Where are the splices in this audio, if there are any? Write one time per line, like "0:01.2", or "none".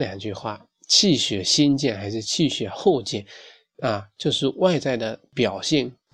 none